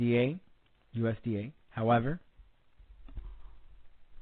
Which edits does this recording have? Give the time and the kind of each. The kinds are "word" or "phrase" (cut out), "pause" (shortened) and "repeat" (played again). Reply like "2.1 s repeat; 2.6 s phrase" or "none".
1.6 s pause